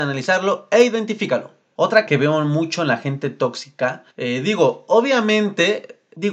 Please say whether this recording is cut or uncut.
cut